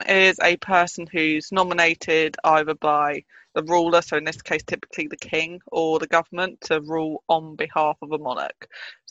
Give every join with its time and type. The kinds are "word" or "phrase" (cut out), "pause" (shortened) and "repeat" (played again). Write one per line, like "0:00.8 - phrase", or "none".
none